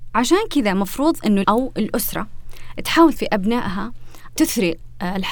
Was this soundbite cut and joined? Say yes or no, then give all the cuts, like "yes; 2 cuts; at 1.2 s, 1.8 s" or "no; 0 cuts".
yes; 3 cuts; at 1.4 s, 3.2 s, 4.4 s